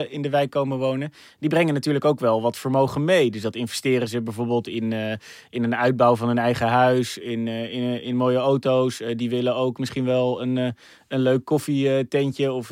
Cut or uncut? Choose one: uncut